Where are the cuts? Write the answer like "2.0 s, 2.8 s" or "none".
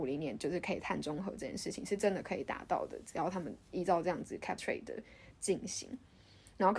4.6 s